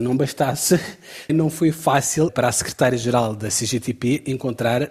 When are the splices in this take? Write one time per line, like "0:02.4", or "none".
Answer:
0:01.3
0:02.3